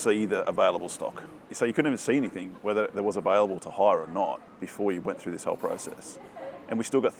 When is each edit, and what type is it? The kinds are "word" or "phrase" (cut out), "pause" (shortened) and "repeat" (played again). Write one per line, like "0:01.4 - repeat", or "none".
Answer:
none